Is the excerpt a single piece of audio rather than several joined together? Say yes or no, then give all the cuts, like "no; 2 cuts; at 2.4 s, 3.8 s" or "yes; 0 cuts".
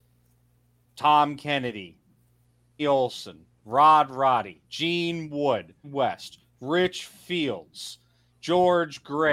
no; 3 cuts; at 2.8 s, 4.6 s, 5.8 s